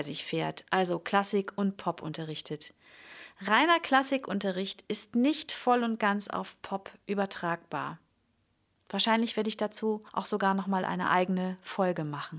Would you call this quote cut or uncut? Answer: uncut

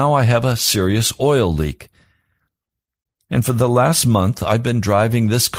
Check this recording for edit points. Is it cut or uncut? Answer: uncut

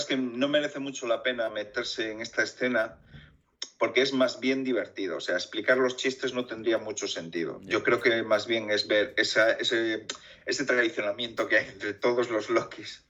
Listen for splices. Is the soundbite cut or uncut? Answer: uncut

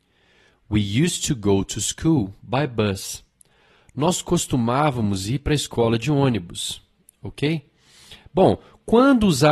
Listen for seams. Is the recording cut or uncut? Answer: uncut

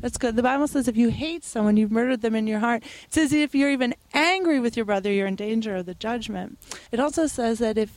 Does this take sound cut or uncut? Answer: cut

